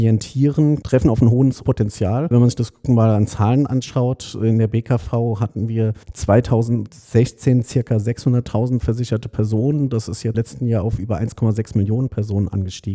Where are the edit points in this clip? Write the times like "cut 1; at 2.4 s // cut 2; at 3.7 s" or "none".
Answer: cut 1; at 6.0 s // cut 2; at 10.3 s